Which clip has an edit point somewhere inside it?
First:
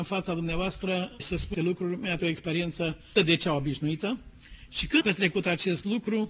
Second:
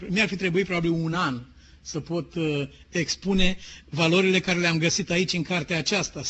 first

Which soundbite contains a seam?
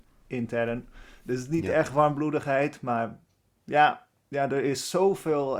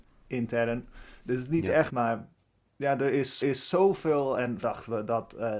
second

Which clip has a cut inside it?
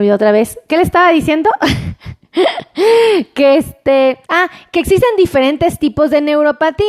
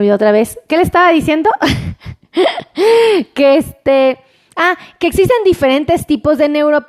first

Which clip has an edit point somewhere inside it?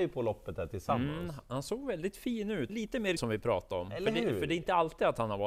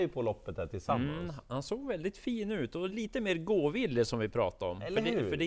first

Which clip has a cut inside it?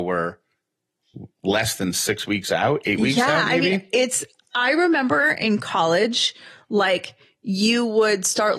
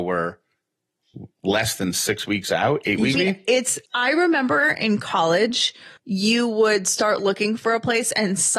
second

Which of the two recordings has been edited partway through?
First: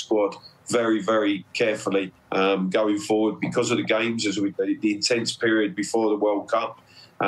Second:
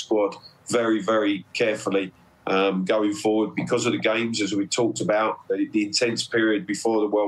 first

